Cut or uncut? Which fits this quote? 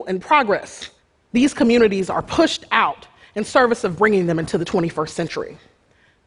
uncut